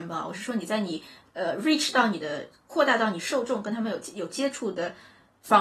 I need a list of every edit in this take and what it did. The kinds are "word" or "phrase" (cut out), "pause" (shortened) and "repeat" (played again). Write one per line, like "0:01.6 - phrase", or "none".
none